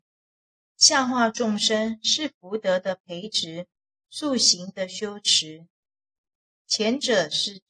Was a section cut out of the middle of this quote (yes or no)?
no